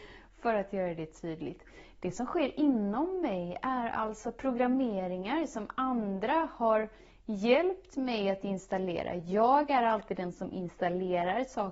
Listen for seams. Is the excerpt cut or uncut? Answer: uncut